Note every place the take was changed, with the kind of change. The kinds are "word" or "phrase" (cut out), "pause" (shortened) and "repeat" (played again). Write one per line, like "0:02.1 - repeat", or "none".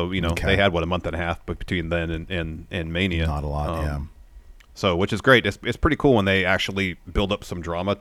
none